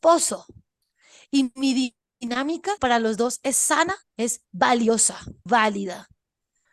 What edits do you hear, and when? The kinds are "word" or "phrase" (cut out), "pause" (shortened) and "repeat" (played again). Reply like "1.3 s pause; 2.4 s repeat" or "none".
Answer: 2.8 s word; 4.1 s pause; 5.5 s word